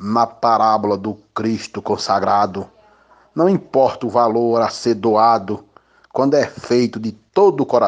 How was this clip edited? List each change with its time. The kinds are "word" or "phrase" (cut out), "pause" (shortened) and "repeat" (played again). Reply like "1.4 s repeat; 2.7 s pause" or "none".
none